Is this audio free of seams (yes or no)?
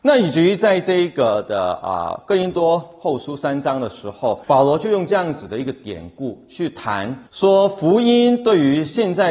no